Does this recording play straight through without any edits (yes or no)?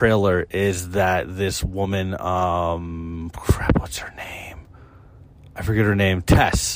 yes